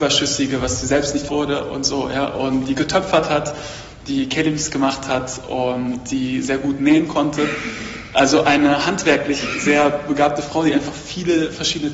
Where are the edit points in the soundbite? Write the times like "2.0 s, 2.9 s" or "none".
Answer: 1.3 s